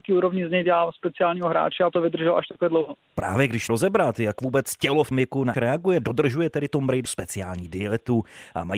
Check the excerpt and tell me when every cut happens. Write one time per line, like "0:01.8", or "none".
0:01.9
0:03.7
0:05.1
0:05.5
0:07.0